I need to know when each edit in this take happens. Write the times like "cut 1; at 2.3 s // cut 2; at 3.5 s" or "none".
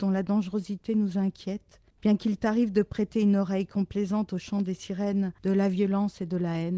cut 1; at 1.9 s // cut 2; at 5.4 s